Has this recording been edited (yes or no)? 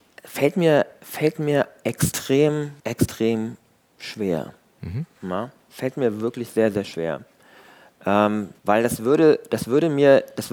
yes